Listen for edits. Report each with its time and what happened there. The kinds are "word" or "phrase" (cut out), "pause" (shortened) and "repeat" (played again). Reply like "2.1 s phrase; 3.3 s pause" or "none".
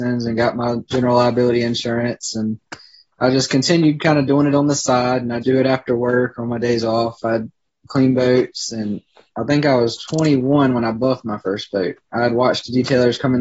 5.4 s word